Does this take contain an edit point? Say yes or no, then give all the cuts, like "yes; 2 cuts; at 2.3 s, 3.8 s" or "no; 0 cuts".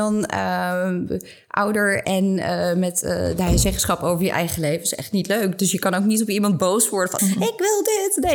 yes; 2 cuts; at 2.0 s, 7.2 s